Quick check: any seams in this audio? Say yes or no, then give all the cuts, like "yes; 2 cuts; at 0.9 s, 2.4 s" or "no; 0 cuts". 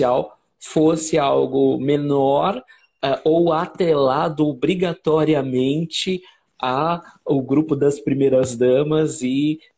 no; 0 cuts